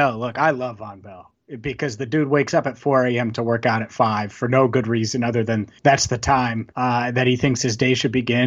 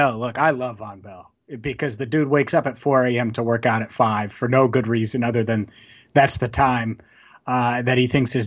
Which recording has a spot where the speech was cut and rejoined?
first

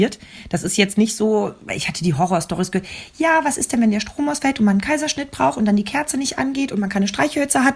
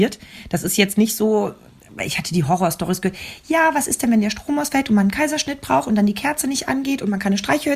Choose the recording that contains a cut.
first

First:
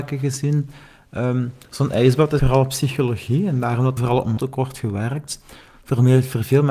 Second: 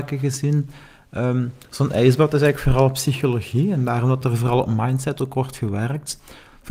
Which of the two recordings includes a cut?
first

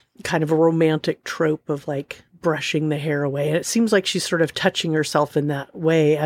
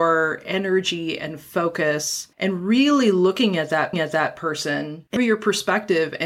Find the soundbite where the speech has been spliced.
second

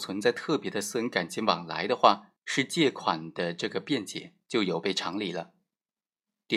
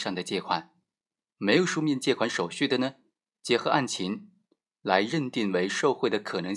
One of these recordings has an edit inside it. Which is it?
first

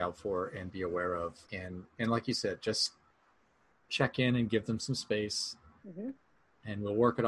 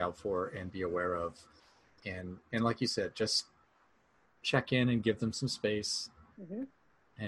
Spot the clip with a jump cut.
first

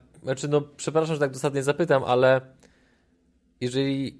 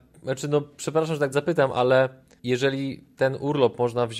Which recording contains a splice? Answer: second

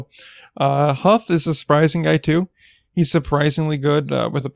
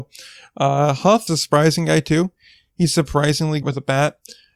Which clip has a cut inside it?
second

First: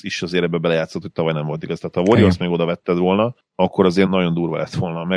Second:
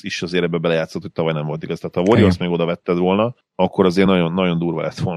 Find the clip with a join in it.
first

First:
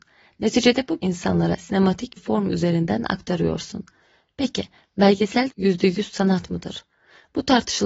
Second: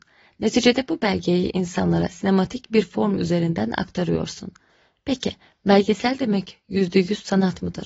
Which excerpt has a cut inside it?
first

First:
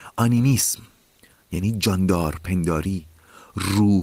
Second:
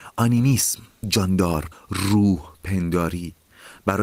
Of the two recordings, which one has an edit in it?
second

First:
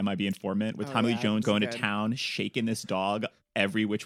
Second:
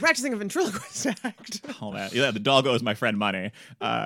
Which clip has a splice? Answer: first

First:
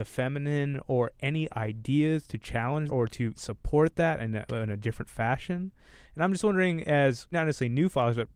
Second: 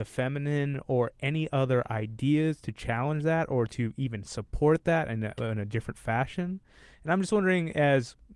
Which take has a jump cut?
first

